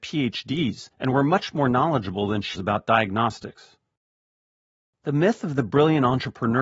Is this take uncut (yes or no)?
no